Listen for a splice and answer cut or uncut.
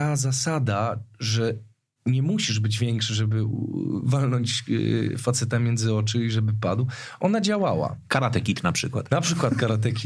uncut